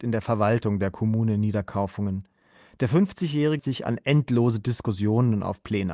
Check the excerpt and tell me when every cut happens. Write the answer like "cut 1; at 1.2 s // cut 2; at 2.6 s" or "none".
cut 1; at 3.6 s

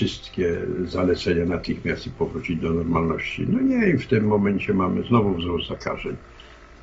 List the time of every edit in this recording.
none

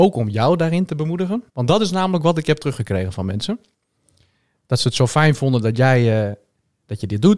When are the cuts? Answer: cut 1; at 1.5 s

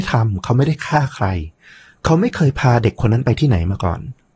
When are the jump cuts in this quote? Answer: none

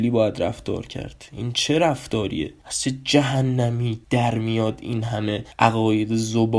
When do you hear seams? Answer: none

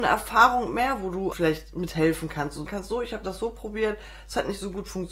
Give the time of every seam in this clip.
cut 1; at 1.3 s // cut 2; at 2.7 s

